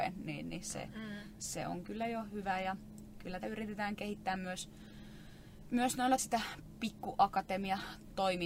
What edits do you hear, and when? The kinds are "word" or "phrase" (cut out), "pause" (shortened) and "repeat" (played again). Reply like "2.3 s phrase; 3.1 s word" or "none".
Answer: 1.8 s word; 3.4 s word; 5.7 s word; 6.2 s word

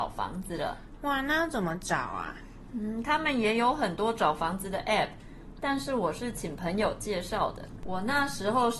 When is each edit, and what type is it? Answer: none

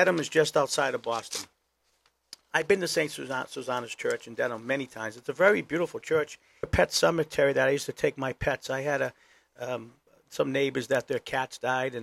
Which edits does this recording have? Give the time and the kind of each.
6.6 s phrase

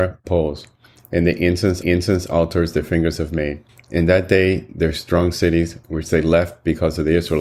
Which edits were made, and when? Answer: 1.8 s repeat; 3.7 s pause; 5.8 s pause

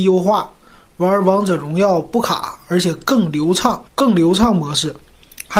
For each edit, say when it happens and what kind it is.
3.9 s pause

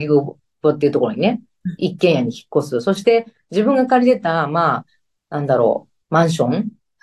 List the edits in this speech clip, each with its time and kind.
6.0 s pause

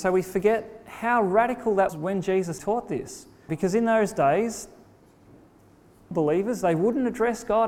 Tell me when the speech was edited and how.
1.9 s word; 2.6 s word; 3.5 s word; 6.1 s word

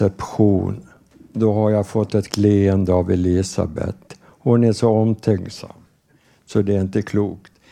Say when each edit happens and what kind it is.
2.3 s word

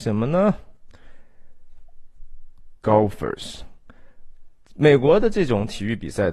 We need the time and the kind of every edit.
2.8 s pause

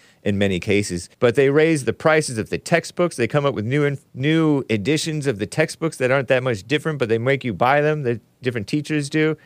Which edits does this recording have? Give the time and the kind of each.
1.1 s pause; 4.1 s pause

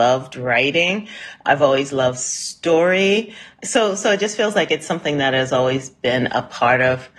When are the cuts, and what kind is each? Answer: none

